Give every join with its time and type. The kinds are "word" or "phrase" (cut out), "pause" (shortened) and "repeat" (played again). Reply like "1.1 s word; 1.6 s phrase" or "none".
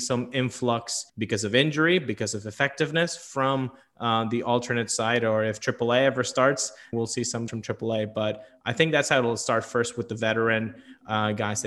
1.1 s pause; 6.9 s word; 7.5 s word